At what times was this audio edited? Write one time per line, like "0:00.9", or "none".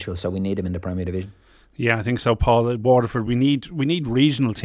none